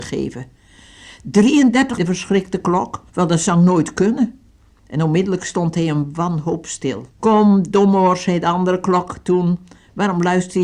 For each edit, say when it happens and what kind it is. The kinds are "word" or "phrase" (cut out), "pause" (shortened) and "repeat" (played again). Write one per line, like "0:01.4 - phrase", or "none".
0:02.0 - phrase
0:03.1 - pause
0:07.1 - pause

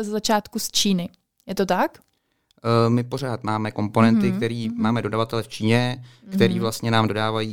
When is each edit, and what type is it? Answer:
none

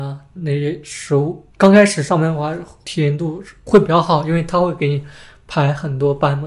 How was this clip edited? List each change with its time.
0:01.5 - pause

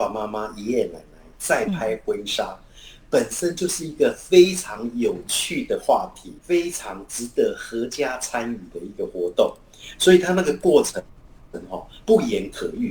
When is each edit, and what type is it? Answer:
0:06.4 - pause

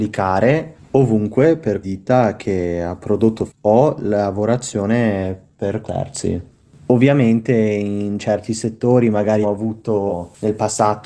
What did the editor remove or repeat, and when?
0:01.8 - word
0:03.5 - word
0:05.8 - word
0:09.4 - word

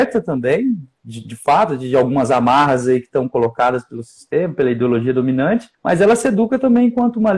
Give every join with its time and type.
0:05.7 - pause

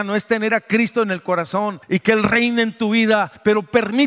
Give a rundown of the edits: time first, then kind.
none

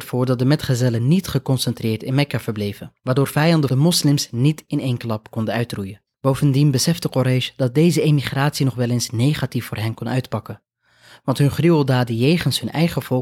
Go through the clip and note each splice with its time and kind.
0:03.0 - pause
0:03.7 - phrase
0:06.1 - pause

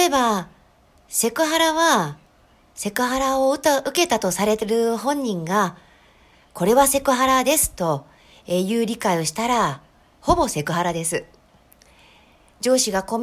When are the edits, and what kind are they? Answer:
0:02.3 - pause

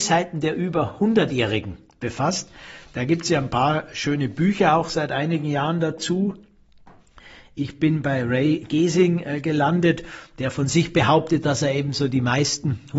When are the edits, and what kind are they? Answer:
none

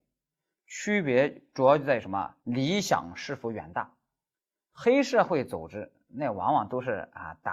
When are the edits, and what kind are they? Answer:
0:02.4 - pause
0:04.3 - pause

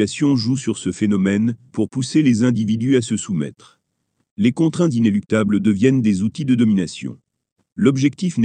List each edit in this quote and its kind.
none

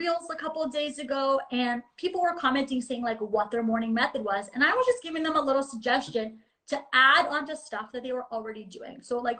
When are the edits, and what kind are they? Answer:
none

